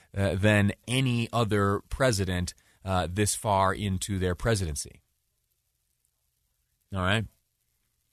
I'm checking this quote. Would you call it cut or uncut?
uncut